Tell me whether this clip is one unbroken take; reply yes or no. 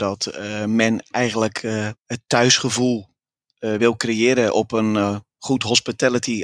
yes